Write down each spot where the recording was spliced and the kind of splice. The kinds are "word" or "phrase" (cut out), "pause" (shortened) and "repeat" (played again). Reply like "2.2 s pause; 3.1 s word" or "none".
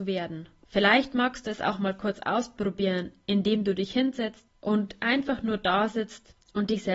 none